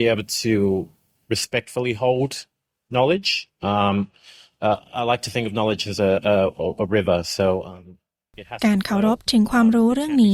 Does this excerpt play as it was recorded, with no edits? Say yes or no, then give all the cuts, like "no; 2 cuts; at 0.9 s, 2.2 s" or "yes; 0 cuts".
yes; 0 cuts